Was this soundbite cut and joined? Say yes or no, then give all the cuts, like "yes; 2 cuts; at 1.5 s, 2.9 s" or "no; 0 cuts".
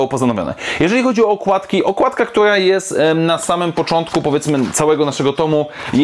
no; 0 cuts